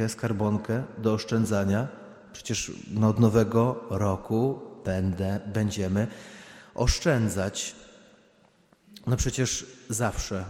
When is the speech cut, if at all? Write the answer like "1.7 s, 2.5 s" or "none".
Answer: none